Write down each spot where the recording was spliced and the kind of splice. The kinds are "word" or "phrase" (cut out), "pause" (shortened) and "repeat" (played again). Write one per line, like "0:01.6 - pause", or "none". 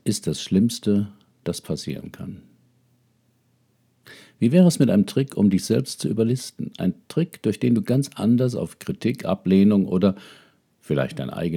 none